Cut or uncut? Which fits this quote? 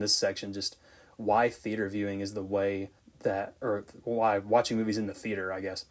cut